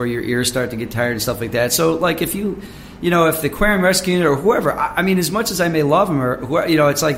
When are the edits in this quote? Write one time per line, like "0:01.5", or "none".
none